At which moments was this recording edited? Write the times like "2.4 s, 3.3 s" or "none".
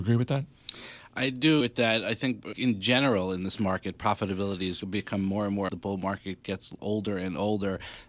1.6 s, 2.5 s, 4.8 s, 5.7 s, 6.8 s